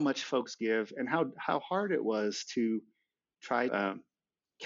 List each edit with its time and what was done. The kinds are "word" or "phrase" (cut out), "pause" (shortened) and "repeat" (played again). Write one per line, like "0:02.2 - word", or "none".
0:03.7 - word